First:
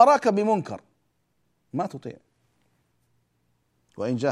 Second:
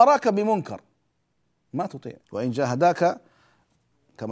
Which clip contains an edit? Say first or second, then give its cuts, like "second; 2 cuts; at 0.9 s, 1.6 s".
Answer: second; 1 cut; at 2.2 s